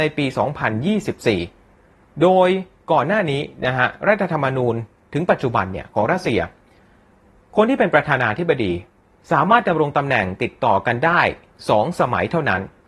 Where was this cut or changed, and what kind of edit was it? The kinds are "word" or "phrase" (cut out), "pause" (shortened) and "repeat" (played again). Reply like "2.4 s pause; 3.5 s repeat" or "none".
none